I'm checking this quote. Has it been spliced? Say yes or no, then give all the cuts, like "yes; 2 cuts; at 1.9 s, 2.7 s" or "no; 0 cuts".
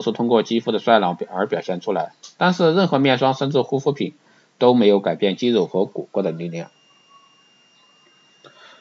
no; 0 cuts